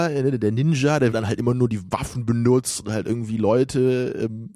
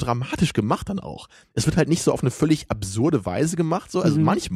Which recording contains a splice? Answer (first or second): first